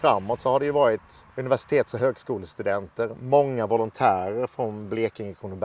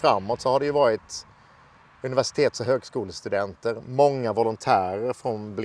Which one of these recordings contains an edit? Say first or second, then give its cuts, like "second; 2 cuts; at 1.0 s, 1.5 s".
first; 1 cut; at 1.3 s